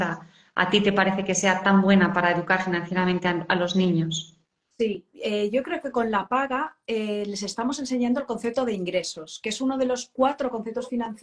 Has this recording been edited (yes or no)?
no